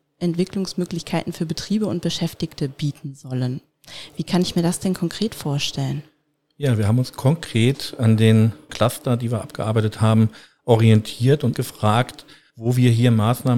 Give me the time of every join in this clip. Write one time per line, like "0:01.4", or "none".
0:08.7
0:11.5